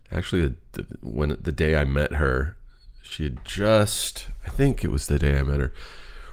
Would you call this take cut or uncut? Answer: uncut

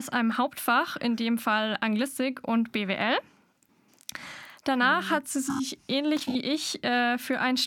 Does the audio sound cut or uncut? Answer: uncut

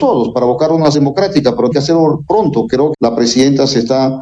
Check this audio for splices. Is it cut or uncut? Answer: cut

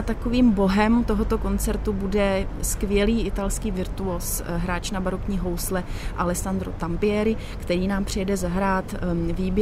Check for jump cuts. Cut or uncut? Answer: uncut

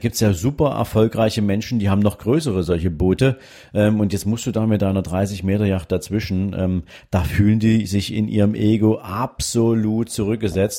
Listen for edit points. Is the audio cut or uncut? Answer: uncut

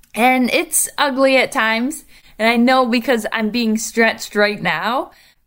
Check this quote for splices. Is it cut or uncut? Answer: uncut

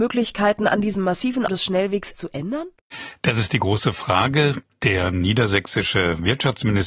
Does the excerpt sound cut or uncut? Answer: cut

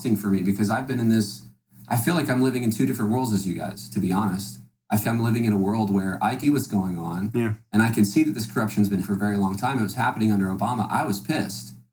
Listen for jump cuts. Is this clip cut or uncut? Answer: cut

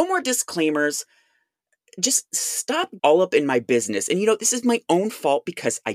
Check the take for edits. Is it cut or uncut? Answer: cut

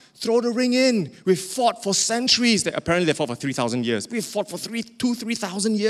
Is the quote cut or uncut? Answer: uncut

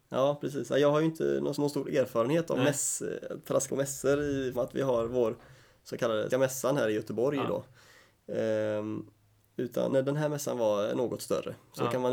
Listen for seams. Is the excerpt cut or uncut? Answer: cut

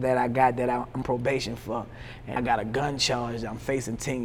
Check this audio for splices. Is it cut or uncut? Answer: cut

